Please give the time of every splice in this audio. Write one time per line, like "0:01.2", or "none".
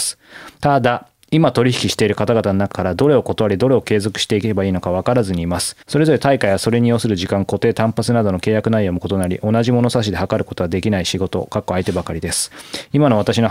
0:05.8